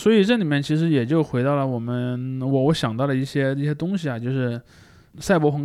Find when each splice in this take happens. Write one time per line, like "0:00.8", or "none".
none